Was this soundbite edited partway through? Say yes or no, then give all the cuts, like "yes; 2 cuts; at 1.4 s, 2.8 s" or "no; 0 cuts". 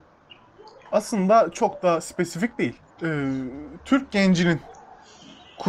yes; 1 cut; at 2.9 s